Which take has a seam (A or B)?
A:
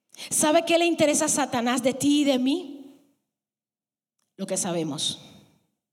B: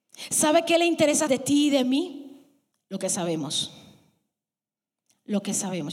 B